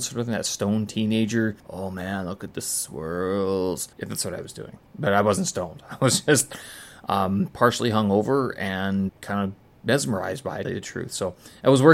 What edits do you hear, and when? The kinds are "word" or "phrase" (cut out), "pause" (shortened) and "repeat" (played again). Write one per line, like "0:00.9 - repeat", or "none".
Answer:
0:01.6 - pause
0:03.9 - pause
0:09.1 - word
0:10.6 - phrase